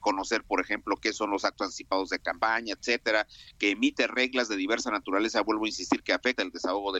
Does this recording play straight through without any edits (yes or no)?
yes